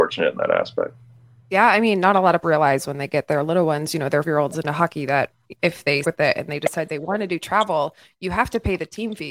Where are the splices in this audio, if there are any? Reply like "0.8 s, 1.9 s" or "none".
2.4 s, 4.2 s, 6.0 s